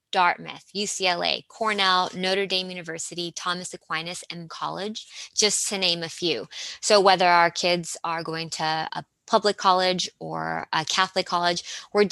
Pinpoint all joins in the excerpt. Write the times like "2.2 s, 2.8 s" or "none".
4.5 s, 8.9 s